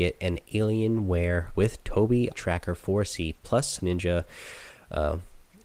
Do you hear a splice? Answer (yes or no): yes